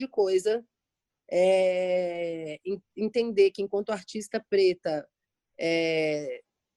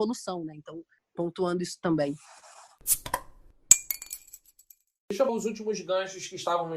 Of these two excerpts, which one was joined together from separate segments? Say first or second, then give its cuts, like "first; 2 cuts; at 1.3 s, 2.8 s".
second; 2 cuts; at 1.0 s, 5.3 s